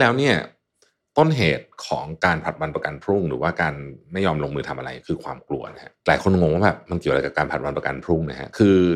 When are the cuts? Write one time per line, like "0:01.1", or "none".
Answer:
0:06.0